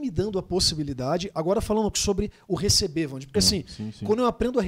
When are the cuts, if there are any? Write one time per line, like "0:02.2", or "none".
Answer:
0:01.9
0:03.3